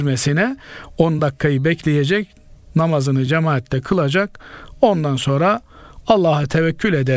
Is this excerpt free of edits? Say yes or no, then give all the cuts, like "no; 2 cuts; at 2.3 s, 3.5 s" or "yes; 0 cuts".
yes; 0 cuts